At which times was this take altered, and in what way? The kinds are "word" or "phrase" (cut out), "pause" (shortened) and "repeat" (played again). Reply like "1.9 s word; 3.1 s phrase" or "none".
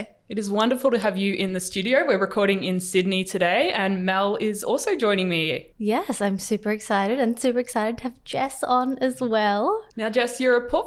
5.7 s pause; 9.9 s pause

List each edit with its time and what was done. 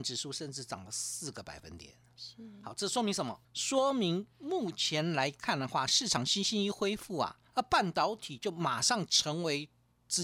3.4 s pause; 7.5 s pause

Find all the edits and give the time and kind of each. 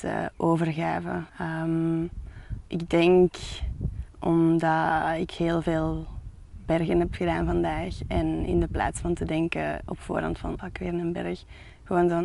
1.3 s pause; 2.7 s pause; 4.1 s pause; 10.6 s word

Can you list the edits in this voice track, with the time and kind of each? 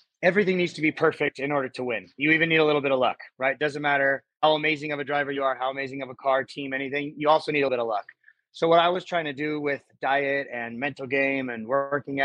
2.1 s pause; 4.4 s word; 7.7 s word

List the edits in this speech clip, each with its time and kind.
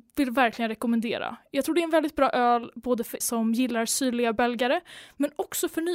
3.2 s word

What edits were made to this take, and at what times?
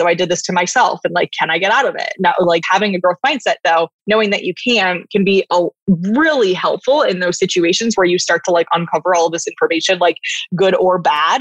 2.6 s word; 4.0 s pause

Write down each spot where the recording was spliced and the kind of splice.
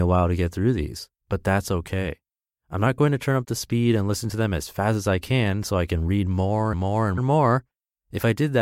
1.2 s pause; 6.7 s word; 7.2 s word

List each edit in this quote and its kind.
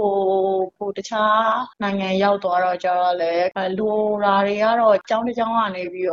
1.7 s pause

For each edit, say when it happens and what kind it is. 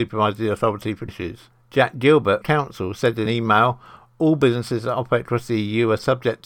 1.1 s phrase; 2.4 s phrase; 3.3 s word

